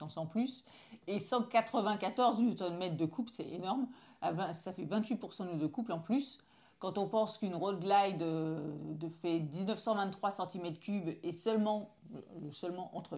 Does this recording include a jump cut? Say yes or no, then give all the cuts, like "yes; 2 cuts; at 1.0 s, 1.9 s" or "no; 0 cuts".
no; 0 cuts